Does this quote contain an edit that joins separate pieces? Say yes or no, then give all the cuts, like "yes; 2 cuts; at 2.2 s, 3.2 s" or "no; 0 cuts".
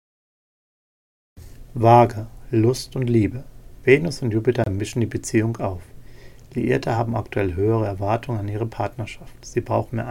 no; 0 cuts